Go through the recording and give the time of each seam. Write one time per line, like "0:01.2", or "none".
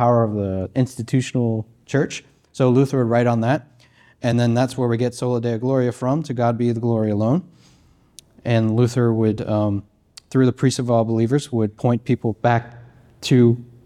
none